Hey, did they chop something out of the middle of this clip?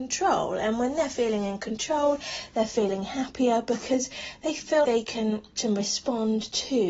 yes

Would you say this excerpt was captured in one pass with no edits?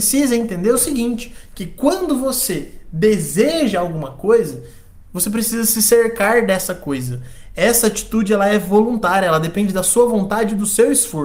yes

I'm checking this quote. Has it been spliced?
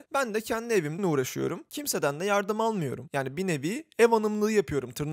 yes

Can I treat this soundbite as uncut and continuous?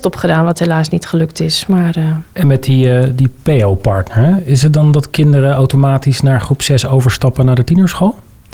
yes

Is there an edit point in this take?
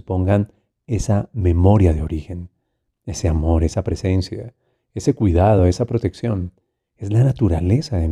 no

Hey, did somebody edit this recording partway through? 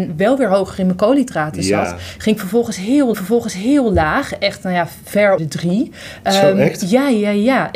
yes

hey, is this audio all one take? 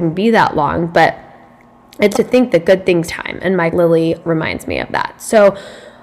no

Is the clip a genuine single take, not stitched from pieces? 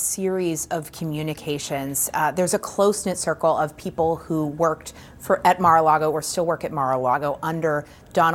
yes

